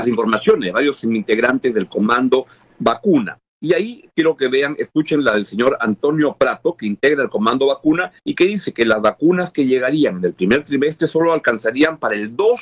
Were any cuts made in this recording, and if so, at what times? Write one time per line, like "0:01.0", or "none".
0:08.2